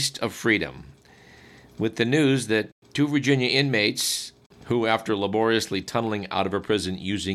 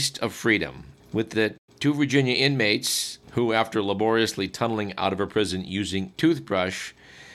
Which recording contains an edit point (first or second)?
second